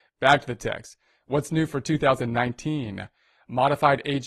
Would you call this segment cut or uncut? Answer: uncut